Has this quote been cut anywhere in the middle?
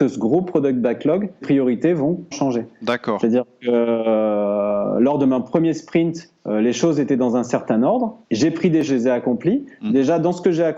yes; 5 cuts; at 1.4 s, 2.3 s, 6.4 s, 8.2 s, 8.9 s

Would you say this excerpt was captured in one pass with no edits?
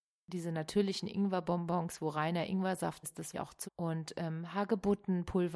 no; 3 cuts; at 3.0 s, 3.3 s, 3.6 s

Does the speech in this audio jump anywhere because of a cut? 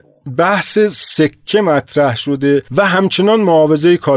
yes; 1 cut; at 2.7 s

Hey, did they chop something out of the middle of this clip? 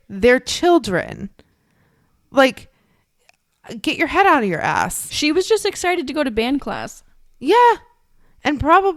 no; 0 cuts

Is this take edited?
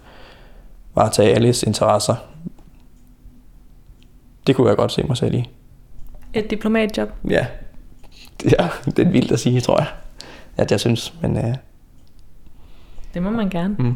no; 0 cuts

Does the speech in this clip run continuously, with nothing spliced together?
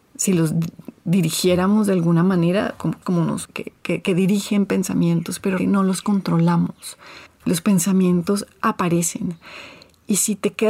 no; 4 cuts; at 3.0 s, 3.5 s, 5.6 s, 7.3 s

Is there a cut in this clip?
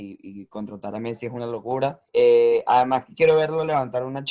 yes; 1 cut; at 2.1 s

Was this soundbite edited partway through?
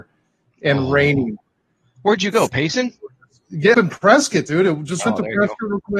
yes; 2 cuts; at 3.7 s, 5.1 s

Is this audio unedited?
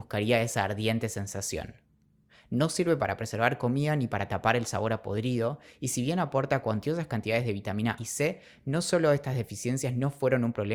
no; 1 cut; at 8.0 s

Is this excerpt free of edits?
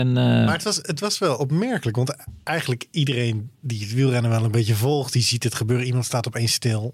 no; 1 cut; at 3.5 s

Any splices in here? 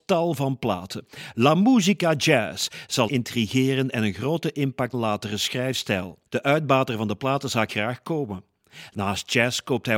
yes; 4 cuts; at 3.1 s, 4.9 s, 6.3 s, 7.7 s

